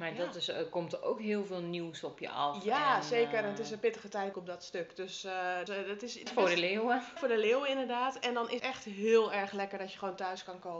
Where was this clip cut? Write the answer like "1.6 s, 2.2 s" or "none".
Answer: 4.3 s, 5.7 s, 6.3 s, 7.2 s, 8.6 s

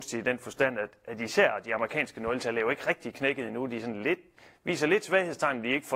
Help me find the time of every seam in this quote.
none

